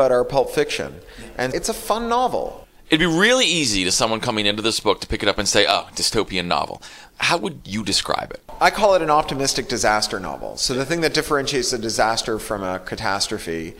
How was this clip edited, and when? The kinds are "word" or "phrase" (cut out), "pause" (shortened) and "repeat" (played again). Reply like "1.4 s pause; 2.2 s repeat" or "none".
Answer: 1.5 s word